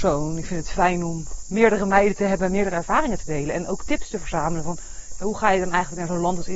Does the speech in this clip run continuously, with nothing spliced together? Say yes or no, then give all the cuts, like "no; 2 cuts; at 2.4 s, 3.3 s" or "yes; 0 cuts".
yes; 0 cuts